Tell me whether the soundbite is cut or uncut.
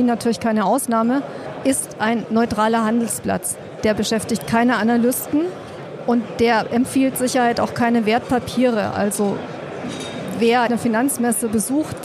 cut